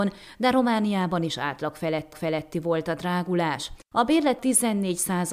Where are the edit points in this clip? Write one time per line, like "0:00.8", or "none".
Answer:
0:02.1
0:04.4